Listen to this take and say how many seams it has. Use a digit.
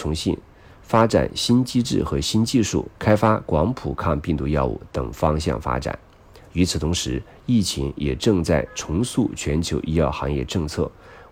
1